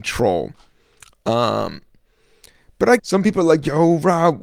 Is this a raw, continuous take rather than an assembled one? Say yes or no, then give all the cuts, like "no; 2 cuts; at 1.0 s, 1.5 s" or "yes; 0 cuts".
no; 1 cut; at 3.0 s